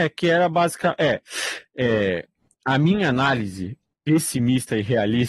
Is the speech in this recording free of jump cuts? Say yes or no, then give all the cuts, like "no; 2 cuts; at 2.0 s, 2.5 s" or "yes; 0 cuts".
yes; 0 cuts